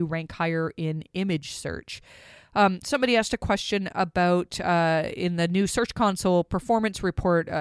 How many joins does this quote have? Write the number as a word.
zero